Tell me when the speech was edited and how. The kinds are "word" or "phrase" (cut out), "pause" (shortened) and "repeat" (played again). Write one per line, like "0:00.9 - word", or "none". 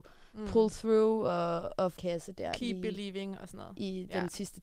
0:02.0 - phrase

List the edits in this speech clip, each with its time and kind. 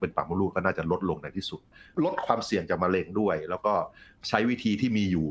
none

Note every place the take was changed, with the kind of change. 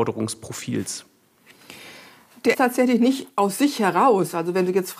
0:02.5 - word

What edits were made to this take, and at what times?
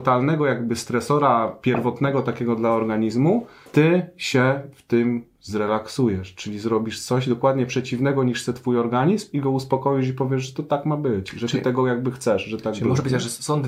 0:03.7 - pause

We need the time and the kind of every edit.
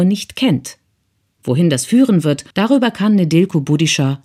0:02.5 - pause

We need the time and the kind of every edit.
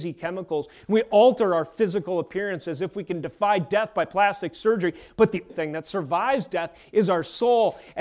0:05.5 - word

